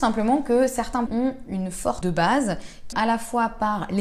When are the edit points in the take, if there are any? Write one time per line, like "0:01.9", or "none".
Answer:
0:01.1
0:02.0
0:02.9